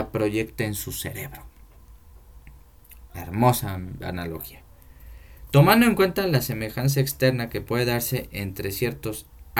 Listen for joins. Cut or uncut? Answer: cut